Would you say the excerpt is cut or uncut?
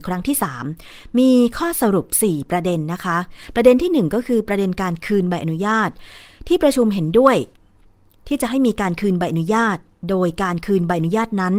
uncut